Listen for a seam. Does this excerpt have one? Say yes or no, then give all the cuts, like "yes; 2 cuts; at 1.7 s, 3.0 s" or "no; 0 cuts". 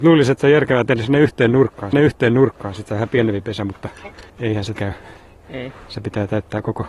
yes; 3 cuts; at 1.9 s, 4.3 s, 4.7 s